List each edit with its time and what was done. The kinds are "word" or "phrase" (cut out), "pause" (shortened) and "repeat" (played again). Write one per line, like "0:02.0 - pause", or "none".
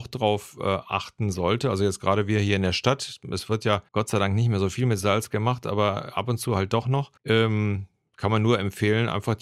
0:03.9 - pause
0:07.2 - pause